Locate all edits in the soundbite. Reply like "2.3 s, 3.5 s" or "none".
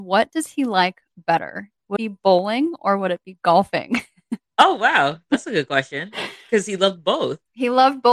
2.0 s